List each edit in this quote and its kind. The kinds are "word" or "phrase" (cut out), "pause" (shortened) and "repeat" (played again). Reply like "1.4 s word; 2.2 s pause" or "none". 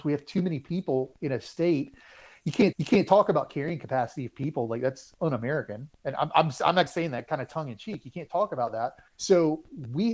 2.7 s repeat; 6.9 s word; 9.1 s pause